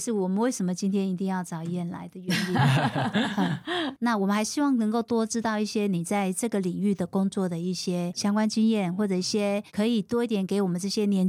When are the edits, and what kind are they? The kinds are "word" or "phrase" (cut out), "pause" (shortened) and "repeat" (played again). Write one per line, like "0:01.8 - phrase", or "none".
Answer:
0:09.7 - pause

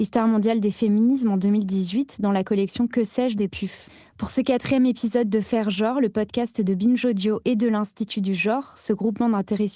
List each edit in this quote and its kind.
none

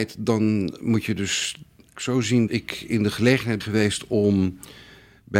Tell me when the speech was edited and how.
0:01.9 - word
0:02.5 - word
0:03.6 - word

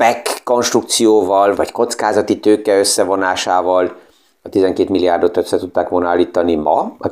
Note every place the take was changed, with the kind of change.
0:01.6 - word

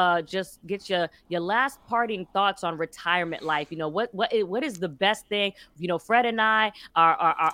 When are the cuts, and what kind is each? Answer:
none

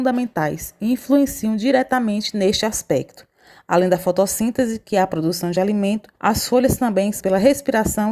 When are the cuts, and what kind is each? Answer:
0:06.2 - pause
0:07.2 - word

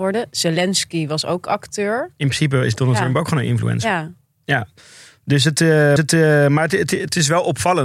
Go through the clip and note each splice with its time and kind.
0:06.0 - repeat

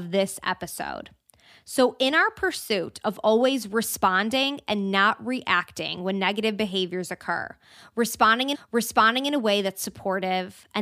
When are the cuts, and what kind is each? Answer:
0:08.5 - repeat

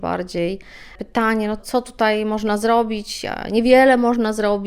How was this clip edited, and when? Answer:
0:01.6 - word

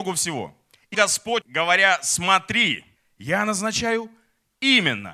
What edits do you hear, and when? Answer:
0:00.9 - word
0:01.4 - word
0:03.0 - pause

